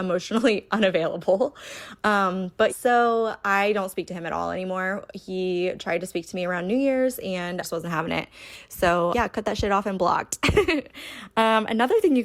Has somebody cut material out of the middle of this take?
yes; 3 cuts; at 2.7 s, 7.6 s, 9.1 s

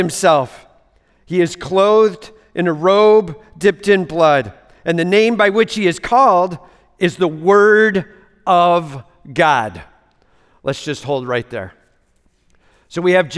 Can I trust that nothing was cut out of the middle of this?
yes; 0 cuts

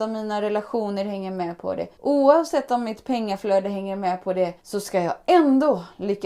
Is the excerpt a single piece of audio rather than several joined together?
no; 2 cuts; at 1.9 s, 4.6 s

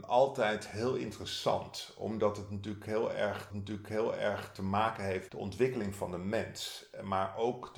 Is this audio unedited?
no; 2 cuts; at 3.5 s, 5.3 s

